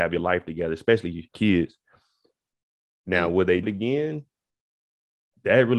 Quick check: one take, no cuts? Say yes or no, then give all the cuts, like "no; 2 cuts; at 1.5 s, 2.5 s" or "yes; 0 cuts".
no; 2 cuts; at 1.3 s, 3.6 s